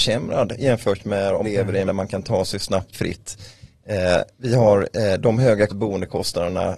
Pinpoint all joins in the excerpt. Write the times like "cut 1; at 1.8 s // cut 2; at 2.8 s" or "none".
cut 1; at 1.4 s // cut 2; at 1.8 s // cut 3; at 2.9 s // cut 4; at 4.3 s // cut 5; at 5.7 s